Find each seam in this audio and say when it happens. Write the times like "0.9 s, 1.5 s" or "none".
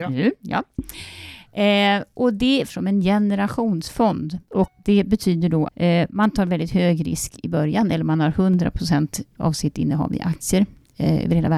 2.7 s, 5.7 s, 9.3 s